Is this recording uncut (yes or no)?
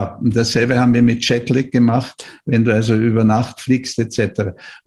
yes